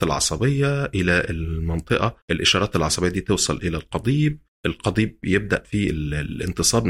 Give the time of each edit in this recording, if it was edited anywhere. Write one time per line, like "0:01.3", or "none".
0:02.2
0:04.5
0:05.6